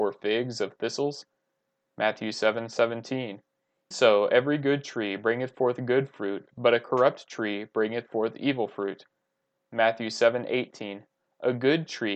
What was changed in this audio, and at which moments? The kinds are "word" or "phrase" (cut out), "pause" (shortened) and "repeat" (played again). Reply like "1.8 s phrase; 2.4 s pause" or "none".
3.9 s word